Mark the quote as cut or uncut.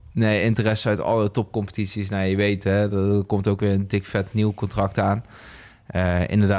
uncut